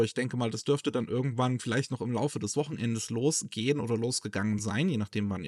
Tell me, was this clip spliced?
no; 0 cuts

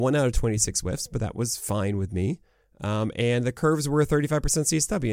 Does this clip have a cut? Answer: no; 0 cuts

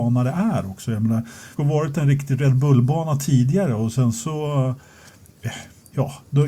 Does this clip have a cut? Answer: yes; 1 cut; at 1.6 s

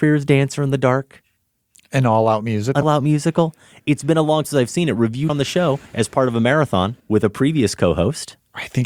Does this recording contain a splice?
yes; 5 cuts; at 2.8 s, 4.4 s, 5.3 s, 5.9 s, 7.0 s

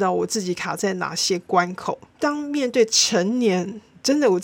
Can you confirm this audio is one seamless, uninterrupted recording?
no; 1 cut; at 2.1 s

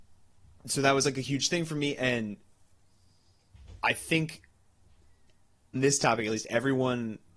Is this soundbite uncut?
no; 1 cut; at 5.8 s

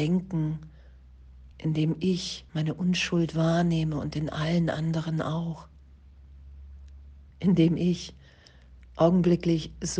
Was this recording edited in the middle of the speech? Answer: yes; 3 cuts; at 1.5 s, 2.5 s, 7.3 s

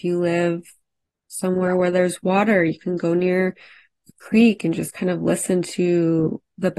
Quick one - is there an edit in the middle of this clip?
no; 0 cuts

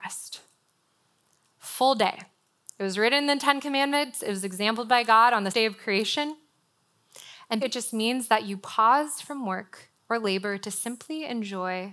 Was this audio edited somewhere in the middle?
yes; 3 cuts; at 5.5 s, 7.6 s, 10.0 s

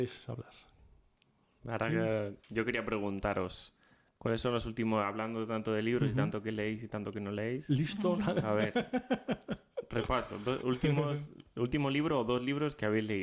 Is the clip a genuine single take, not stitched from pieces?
no; 1 cut; at 8.2 s

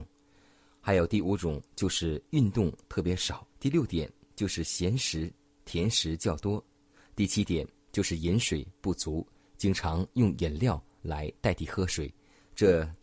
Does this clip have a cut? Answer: yes; 1 cut; at 3.5 s

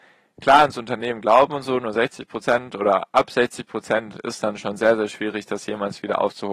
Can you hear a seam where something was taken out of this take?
no; 0 cuts

